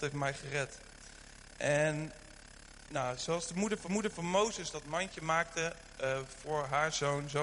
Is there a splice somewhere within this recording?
yes; 1 cut; at 3.8 s

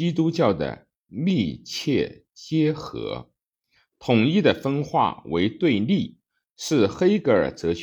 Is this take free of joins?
yes; 0 cuts

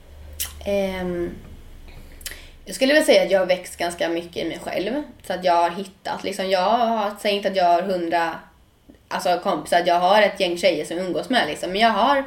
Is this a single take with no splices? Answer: yes; 0 cuts

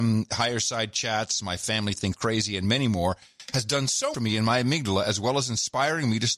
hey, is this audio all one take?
no; 2 cuts; at 2.1 s, 4.1 s

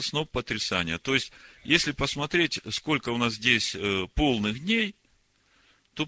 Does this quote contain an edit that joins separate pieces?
no; 0 cuts

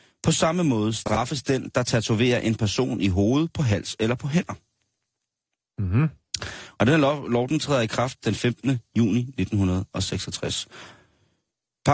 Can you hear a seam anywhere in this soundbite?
no; 0 cuts

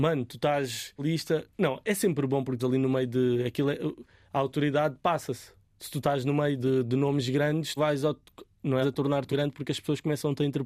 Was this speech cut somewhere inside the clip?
yes; 7 cuts; at 1.0 s, 1.5 s, 2.6 s, 6.6 s, 7.8 s, 8.8 s, 9.3 s

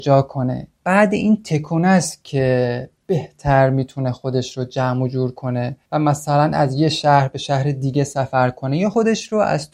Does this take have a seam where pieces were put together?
yes; 1 cut; at 5.8 s

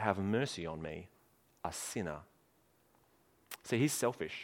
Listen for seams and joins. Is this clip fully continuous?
yes; 0 cuts

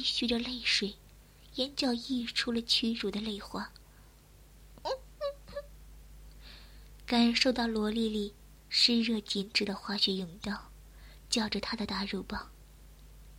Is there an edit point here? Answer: yes; 1 cut; at 8.6 s

